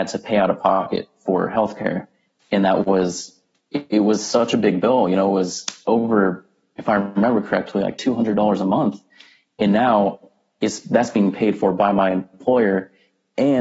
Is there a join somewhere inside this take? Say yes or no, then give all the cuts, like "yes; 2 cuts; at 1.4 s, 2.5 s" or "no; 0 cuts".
no; 0 cuts